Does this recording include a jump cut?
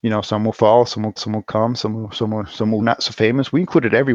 yes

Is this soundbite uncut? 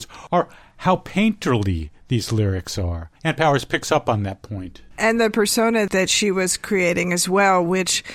no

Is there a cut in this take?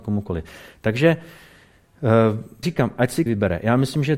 yes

